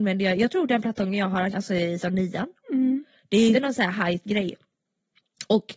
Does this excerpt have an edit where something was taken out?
yes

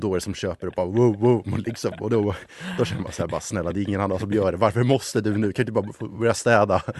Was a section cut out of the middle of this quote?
no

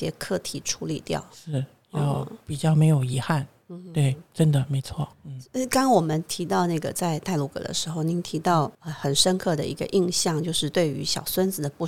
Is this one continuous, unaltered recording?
no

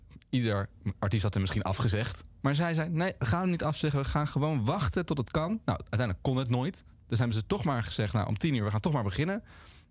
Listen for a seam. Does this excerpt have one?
no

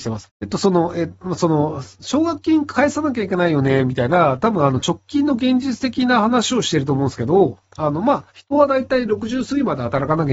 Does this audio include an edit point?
yes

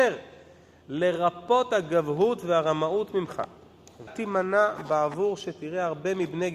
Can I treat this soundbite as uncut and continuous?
no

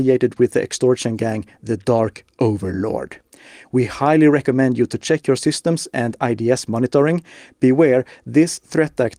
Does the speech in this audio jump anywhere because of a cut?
no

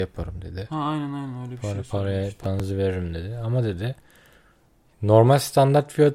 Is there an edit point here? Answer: no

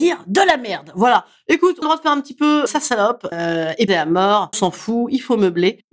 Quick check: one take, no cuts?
no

